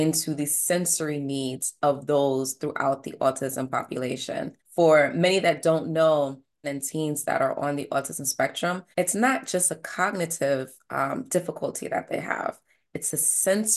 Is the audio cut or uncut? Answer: cut